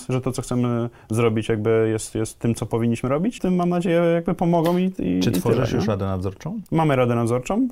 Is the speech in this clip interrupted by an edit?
yes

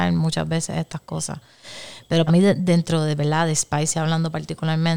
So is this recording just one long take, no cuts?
no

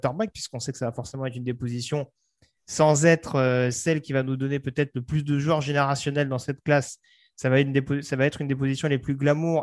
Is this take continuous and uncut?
yes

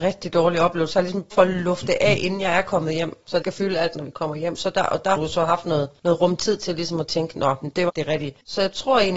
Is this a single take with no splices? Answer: no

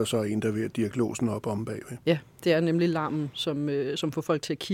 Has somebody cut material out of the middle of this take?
no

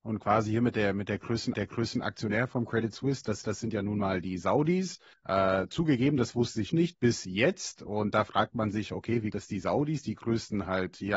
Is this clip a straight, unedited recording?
no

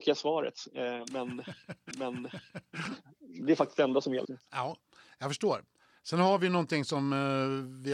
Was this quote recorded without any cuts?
no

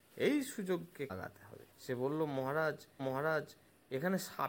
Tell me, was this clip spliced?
yes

